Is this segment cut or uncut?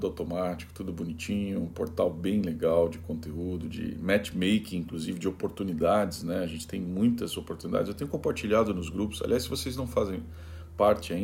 uncut